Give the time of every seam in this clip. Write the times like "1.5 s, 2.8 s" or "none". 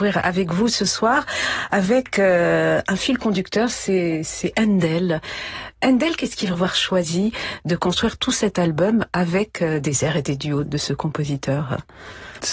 6.5 s, 10.6 s